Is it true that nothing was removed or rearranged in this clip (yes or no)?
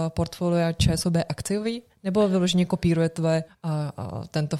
no